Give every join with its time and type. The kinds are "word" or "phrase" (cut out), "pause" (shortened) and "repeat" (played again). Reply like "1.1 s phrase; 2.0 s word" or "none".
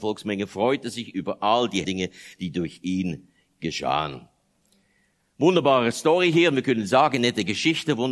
1.8 s word